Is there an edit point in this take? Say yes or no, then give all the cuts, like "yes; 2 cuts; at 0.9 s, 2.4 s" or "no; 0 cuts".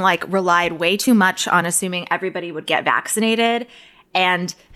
no; 0 cuts